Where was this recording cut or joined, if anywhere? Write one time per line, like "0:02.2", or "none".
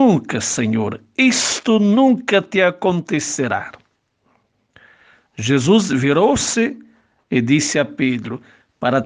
none